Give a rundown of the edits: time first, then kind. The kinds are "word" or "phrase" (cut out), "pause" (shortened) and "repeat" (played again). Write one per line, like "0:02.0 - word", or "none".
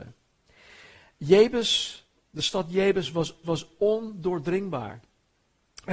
0:03.4 - repeat